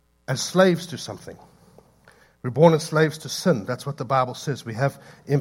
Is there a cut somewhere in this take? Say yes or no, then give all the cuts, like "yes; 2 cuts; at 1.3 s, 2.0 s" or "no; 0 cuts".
no; 0 cuts